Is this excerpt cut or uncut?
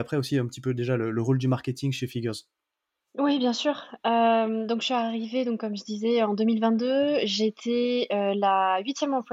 uncut